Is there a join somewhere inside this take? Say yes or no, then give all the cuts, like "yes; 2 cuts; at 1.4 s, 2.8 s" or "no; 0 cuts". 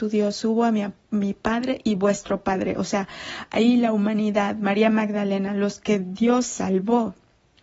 no; 0 cuts